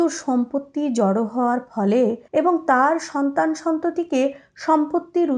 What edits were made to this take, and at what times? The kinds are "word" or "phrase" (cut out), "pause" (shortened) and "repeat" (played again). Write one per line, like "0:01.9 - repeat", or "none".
0:02.3 - pause